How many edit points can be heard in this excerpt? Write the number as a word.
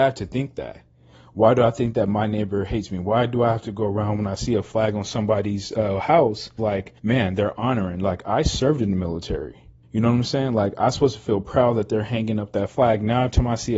three